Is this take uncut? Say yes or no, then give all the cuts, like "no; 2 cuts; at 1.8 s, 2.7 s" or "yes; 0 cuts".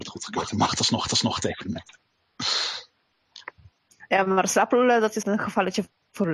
no; 2 cuts; at 1.1 s, 5.2 s